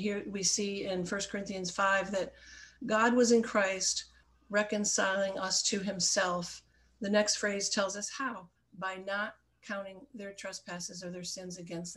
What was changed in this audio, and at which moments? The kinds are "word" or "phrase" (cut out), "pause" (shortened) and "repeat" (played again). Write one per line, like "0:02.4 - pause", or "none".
none

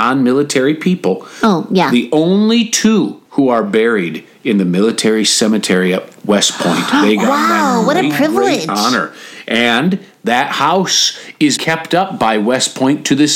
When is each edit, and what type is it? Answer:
0:03.3 - pause
0:11.6 - word

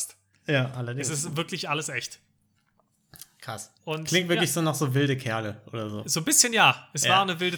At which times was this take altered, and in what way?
0:03.8 - pause

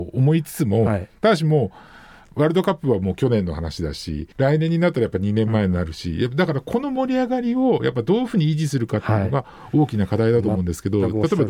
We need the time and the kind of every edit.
0:04.3 - pause

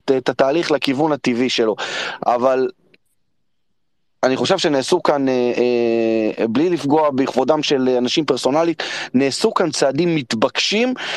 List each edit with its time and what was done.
none

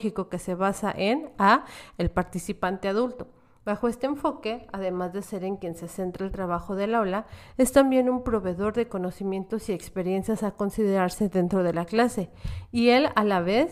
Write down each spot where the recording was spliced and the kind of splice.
none

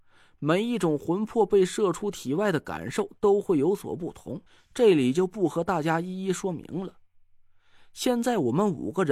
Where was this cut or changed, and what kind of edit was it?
0:04.5 - pause

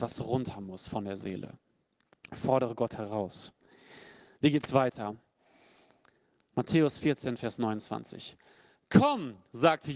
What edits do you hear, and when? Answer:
none

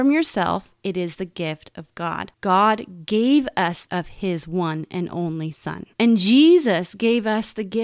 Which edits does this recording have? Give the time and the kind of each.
0:03.9 - phrase

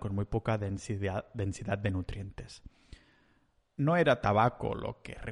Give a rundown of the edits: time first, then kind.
none

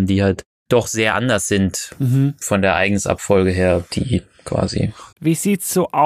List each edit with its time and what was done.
0:05.1 - pause

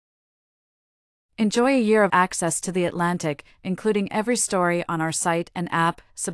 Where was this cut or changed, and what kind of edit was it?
0:02.1 - word

